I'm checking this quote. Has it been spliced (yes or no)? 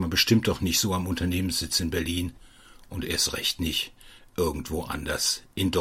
no